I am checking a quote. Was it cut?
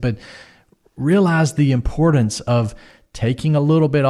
no; 0 cuts

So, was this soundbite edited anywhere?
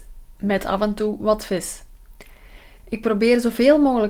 no; 0 cuts

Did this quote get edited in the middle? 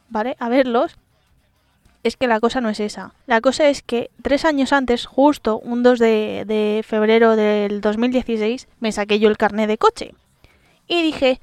yes; 2 cuts; at 3.2 s, 8.7 s

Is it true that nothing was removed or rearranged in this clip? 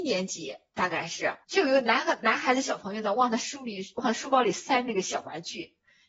no; 1 cut; at 1.4 s

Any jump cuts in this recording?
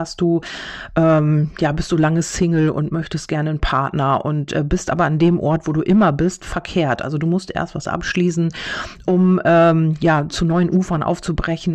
no; 0 cuts

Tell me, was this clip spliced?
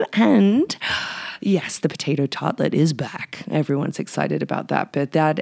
no; 0 cuts

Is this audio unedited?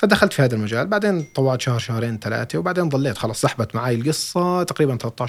yes; 0 cuts

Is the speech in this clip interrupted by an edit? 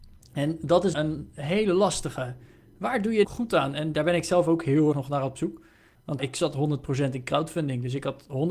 yes; 5 cuts; at 0.9 s, 3.2 s, 3.9 s, 4.9 s, 6.2 s

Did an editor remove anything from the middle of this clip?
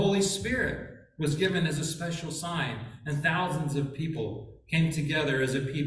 no; 0 cuts

